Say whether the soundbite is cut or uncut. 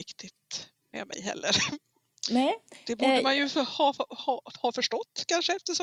uncut